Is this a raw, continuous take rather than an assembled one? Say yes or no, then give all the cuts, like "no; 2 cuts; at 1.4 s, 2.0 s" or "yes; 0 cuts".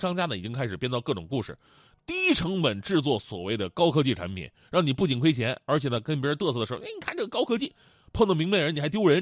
yes; 0 cuts